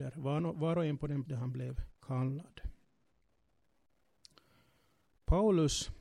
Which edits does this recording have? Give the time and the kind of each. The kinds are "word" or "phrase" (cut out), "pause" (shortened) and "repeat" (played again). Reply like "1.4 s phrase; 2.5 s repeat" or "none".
1.3 s word; 2.0 s pause